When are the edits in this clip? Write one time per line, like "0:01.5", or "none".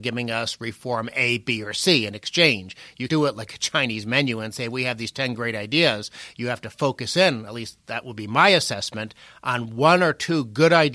0:03.1